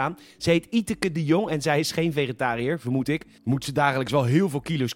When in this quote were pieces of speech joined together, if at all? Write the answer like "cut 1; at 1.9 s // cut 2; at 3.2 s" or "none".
none